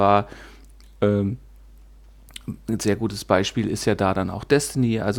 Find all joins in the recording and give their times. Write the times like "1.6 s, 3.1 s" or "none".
none